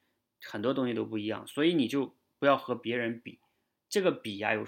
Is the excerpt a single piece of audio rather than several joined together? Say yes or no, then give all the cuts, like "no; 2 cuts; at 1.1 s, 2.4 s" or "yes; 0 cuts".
yes; 0 cuts